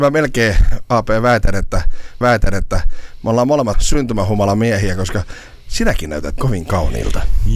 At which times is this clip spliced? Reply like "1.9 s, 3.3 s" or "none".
2.2 s, 3.7 s, 6.4 s